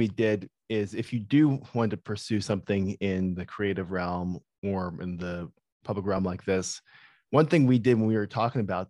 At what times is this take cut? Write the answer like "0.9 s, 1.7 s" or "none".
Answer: none